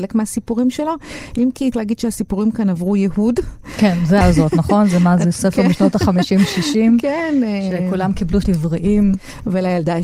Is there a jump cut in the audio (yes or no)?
yes